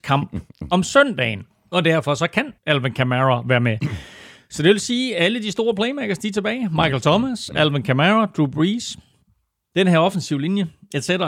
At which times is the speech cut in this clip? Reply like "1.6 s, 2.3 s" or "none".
1.5 s, 2.6 s